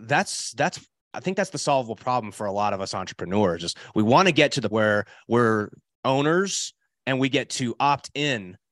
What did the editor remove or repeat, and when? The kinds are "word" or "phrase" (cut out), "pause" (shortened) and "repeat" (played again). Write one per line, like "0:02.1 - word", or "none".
0:04.7 - word